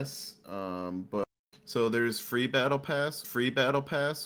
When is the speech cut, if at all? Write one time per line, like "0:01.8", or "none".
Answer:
0:03.2